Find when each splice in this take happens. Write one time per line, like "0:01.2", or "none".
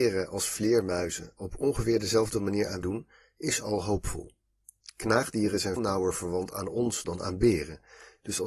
0:02.8
0:05.8